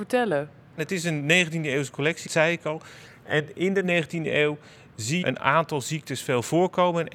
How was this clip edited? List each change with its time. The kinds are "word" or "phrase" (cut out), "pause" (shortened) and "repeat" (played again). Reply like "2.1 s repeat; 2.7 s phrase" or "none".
2.3 s word; 5.2 s word